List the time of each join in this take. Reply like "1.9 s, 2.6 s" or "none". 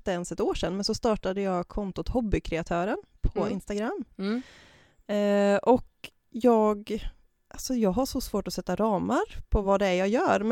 none